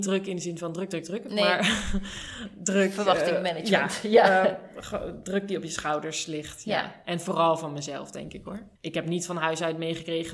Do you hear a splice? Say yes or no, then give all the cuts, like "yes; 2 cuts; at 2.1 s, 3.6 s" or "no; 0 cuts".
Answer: yes; 1 cut; at 8.8 s